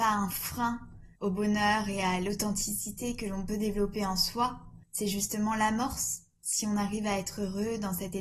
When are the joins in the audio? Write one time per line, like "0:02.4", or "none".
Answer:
0:01.2
0:04.8